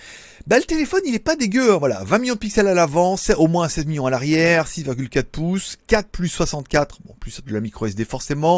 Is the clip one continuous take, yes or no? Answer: yes